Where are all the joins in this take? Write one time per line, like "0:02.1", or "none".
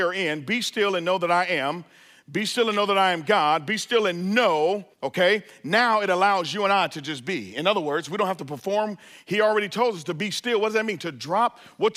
0:04.9